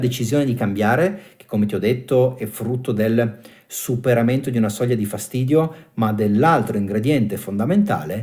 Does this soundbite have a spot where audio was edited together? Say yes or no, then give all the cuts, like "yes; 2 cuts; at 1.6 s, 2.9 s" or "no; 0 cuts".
no; 0 cuts